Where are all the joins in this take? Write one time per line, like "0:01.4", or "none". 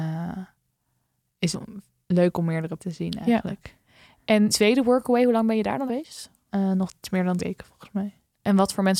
0:01.5
0:02.8
0:04.5
0:05.9
0:07.0
0:07.4

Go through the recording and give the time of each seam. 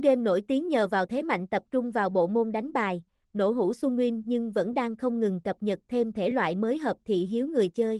none

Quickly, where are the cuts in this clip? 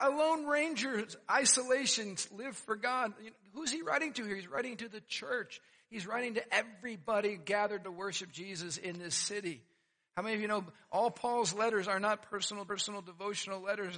0:07.8
0:12.7

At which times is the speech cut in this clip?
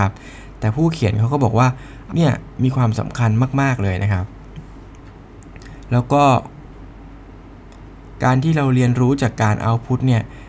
0:02.1

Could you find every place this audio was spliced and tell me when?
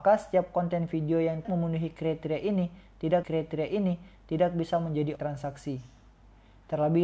0:01.4
0:03.2
0:05.2

